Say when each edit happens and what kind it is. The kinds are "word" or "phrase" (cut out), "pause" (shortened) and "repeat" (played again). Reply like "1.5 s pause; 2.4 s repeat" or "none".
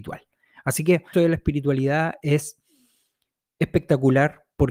1.1 s word